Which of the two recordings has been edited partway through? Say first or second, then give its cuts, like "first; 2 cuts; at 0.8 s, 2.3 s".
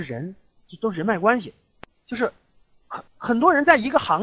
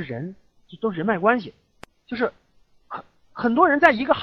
first; 1 cut; at 3.1 s